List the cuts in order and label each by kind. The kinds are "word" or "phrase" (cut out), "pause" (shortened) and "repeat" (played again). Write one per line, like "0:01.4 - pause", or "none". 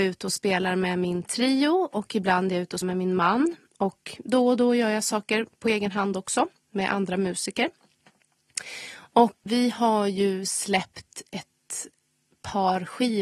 0:02.8 - word
0:09.5 - word